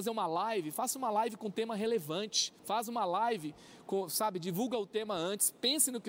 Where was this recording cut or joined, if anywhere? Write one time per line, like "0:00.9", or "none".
0:02.6